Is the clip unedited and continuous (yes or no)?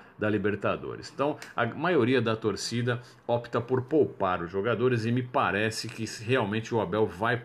yes